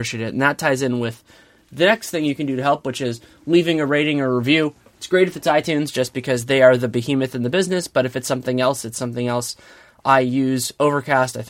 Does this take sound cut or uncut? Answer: uncut